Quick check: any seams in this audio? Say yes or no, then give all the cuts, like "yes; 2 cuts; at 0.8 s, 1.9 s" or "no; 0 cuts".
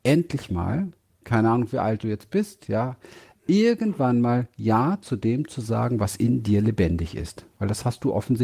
no; 0 cuts